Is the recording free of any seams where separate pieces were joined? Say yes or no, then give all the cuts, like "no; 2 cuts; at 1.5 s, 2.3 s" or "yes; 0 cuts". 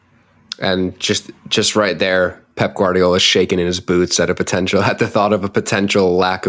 yes; 0 cuts